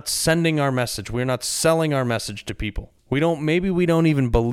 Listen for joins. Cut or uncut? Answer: cut